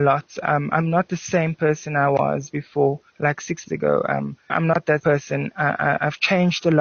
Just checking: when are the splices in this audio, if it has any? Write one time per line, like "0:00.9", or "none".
0:03.1
0:03.6
0:05.0